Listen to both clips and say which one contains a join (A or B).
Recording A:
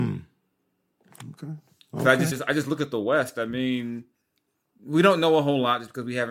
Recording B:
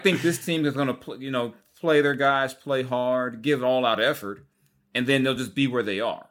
A